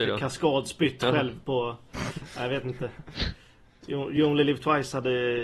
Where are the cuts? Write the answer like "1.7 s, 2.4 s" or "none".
none